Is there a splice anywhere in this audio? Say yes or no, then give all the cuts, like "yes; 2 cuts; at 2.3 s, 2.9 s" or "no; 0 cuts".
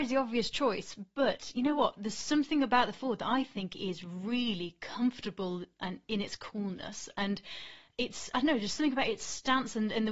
no; 0 cuts